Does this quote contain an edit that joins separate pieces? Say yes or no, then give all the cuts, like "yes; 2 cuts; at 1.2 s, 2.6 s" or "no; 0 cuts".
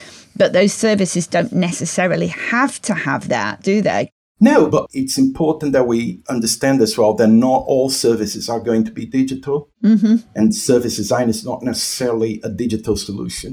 yes; 1 cut; at 4.9 s